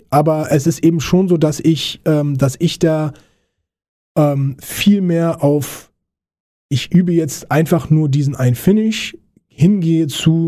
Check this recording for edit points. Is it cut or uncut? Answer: uncut